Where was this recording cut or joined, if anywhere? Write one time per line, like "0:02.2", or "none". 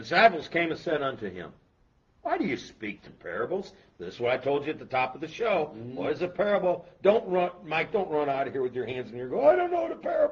0:03.1